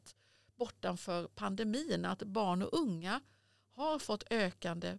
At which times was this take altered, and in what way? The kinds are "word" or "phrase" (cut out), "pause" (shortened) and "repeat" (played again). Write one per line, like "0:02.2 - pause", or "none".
none